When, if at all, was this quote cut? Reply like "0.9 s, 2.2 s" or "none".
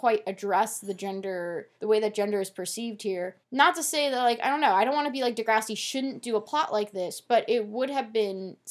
1.7 s, 3.4 s